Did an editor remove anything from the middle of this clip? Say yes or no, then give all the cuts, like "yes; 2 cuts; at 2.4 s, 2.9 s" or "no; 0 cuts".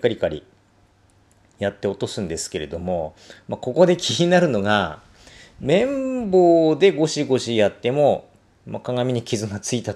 no; 0 cuts